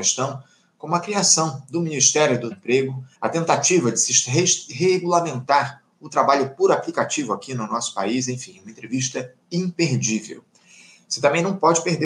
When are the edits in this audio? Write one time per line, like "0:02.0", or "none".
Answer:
0:02.5
0:03.1
0:09.4